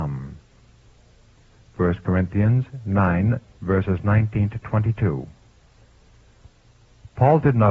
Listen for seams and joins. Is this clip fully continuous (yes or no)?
no